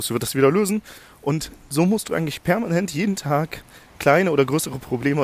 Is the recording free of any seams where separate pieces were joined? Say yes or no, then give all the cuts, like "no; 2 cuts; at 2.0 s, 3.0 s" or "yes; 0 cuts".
yes; 0 cuts